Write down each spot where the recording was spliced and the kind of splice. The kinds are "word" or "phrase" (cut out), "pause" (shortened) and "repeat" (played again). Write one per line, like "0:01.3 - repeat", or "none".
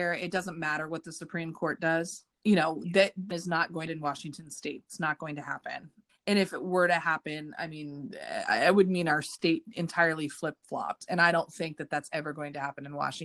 0:02.3 - pause
0:03.3 - word
0:03.9 - phrase
0:06.1 - word